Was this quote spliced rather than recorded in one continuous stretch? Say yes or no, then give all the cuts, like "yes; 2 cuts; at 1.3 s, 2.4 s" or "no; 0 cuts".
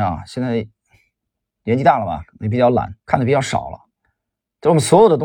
yes; 1 cut; at 3.0 s